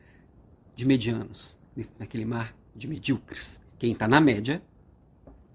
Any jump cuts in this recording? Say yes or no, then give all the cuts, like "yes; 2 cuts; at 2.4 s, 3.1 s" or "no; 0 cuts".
yes; 1 cut; at 3.6 s